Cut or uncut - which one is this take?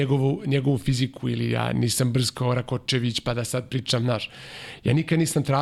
uncut